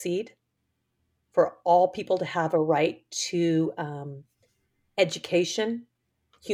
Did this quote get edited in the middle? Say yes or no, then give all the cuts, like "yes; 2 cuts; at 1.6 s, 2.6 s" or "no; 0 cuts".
no; 0 cuts